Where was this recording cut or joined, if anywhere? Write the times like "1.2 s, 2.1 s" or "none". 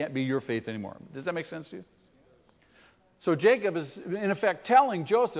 none